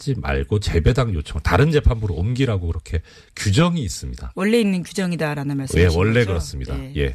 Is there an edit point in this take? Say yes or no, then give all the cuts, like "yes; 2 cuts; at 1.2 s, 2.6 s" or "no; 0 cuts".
no; 0 cuts